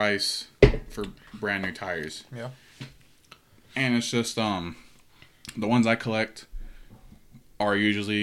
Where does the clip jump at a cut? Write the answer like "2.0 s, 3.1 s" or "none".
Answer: none